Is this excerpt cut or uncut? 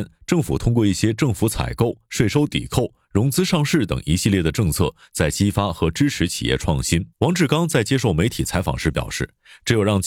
cut